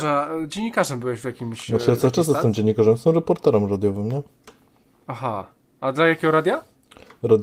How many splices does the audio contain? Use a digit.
0